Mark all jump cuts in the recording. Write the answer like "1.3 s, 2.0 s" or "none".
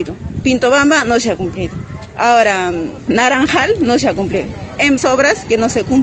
5.0 s